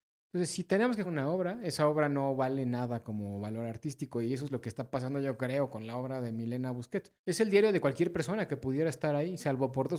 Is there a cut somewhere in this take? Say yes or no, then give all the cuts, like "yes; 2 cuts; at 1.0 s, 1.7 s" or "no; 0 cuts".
yes; 2 cuts; at 1.0 s, 7.2 s